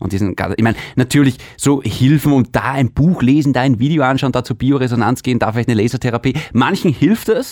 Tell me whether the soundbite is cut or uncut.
uncut